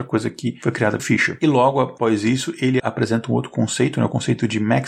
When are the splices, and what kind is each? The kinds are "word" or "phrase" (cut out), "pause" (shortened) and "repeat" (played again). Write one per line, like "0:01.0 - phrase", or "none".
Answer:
0:01.0 - word
0:02.8 - word